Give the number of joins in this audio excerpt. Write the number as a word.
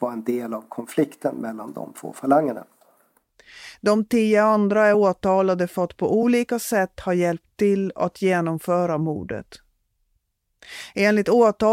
zero